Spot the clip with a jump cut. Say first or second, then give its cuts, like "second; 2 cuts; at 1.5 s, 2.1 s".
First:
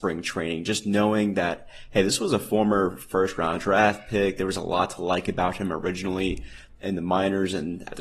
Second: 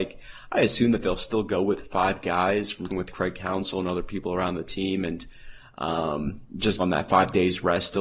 second; 2 cuts; at 2.9 s, 6.8 s